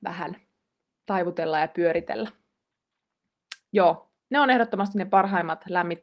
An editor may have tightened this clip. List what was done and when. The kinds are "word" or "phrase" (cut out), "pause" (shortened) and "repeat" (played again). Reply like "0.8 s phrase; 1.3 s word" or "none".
4.2 s pause